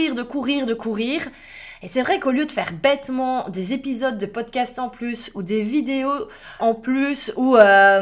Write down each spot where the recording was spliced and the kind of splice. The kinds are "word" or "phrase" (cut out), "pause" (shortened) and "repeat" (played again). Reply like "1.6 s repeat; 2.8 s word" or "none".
6.6 s word